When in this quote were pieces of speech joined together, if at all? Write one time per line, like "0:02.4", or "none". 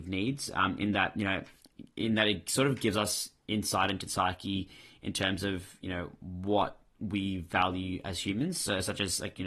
0:04.1